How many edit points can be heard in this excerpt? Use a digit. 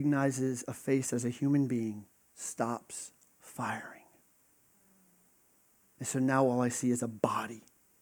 0